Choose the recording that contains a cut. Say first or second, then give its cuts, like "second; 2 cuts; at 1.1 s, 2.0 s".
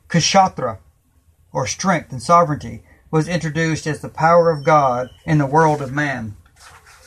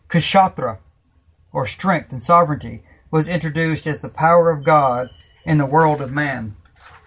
first; 1 cut; at 5.2 s